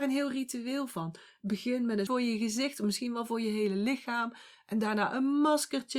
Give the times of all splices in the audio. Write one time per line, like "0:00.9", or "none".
0:02.1